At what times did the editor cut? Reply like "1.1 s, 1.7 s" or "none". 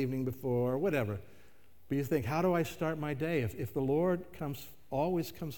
none